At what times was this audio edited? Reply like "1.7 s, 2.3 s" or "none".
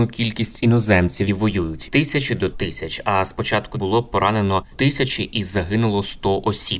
1.3 s, 1.8 s, 2.5 s, 3.7 s, 4.7 s